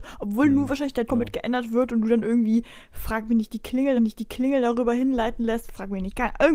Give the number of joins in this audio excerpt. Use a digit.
2